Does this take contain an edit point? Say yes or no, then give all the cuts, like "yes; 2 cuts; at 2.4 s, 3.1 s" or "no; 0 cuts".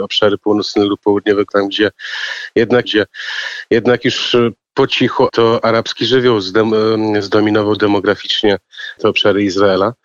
yes; 4 cuts; at 1.5 s, 2.8 s, 5.3 s, 9.0 s